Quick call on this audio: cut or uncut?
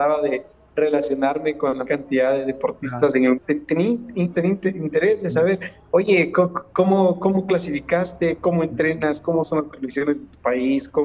cut